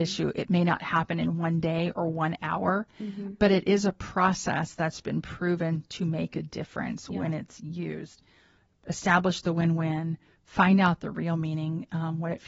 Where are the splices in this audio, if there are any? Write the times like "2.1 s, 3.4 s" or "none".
none